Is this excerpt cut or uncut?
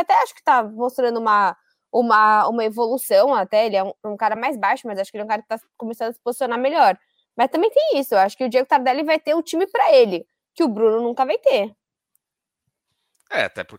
uncut